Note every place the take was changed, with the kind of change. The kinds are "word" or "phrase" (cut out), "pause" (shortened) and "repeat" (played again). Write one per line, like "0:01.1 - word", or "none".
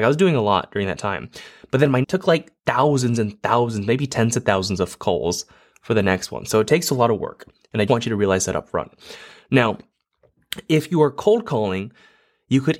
0:02.0 - phrase
0:02.6 - pause
0:07.9 - word